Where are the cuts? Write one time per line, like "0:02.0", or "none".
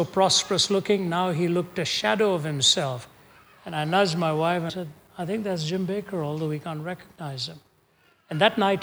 0:04.7